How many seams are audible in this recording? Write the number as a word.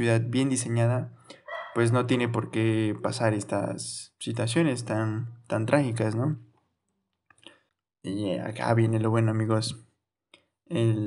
one